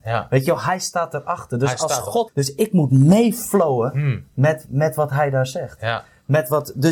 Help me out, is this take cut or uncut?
cut